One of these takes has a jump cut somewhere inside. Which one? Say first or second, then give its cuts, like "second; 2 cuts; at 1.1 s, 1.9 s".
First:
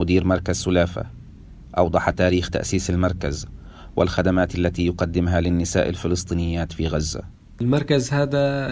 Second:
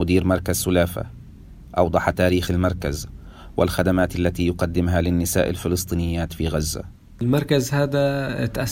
second; 1 cut; at 2.5 s